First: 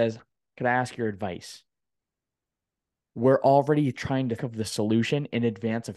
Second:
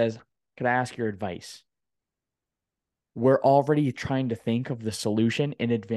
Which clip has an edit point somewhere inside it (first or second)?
first